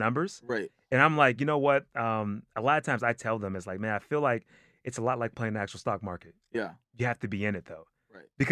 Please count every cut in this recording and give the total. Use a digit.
0